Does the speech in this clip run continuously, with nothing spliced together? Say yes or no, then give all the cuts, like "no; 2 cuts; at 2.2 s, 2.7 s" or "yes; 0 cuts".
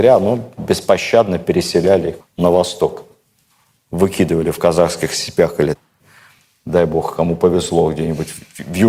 yes; 0 cuts